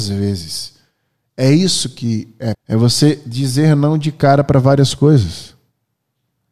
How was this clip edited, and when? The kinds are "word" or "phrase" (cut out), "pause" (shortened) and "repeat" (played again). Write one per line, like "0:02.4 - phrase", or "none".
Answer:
0:02.5 - word

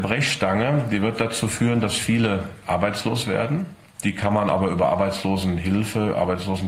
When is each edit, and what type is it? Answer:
none

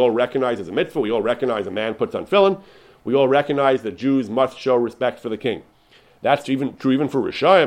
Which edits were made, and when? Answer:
none

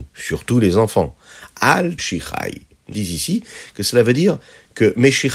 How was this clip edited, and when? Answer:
0:02.0 - word
0:02.9 - word

